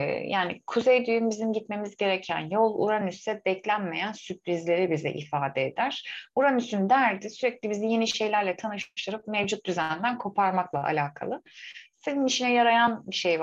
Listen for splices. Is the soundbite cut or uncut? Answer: uncut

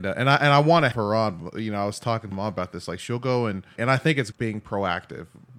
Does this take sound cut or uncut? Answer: cut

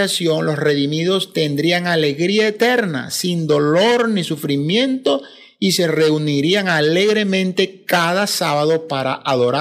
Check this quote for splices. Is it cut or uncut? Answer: uncut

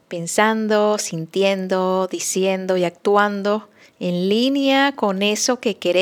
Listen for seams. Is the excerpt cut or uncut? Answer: uncut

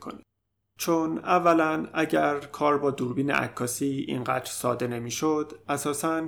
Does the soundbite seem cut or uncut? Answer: uncut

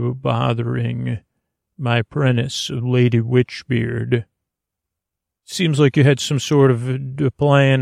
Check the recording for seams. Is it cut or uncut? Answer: uncut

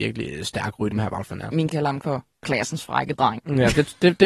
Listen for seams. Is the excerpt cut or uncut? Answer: cut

